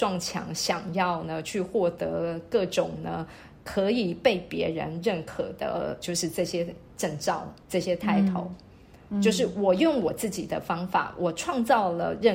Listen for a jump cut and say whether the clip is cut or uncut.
cut